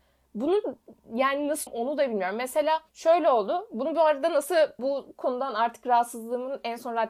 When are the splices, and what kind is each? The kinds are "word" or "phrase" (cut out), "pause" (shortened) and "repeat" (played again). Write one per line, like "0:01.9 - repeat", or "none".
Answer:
0:01.7 - word
0:02.9 - pause
0:04.8 - phrase